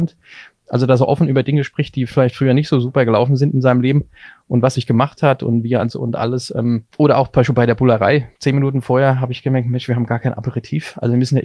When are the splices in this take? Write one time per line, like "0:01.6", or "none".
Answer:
0:04.7
0:05.9
0:06.9
0:08.3